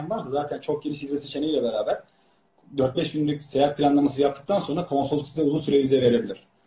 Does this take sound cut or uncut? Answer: uncut